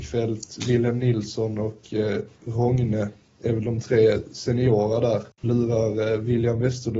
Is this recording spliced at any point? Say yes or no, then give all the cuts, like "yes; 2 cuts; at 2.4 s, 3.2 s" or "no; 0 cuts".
yes; 1 cut; at 5.4 s